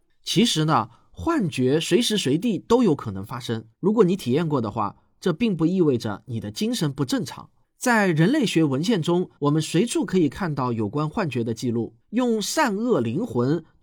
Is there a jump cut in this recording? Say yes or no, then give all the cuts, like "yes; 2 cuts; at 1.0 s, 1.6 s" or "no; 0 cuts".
yes; 4 cuts; at 3.7 s, 7.6 s, 9.4 s, 12.0 s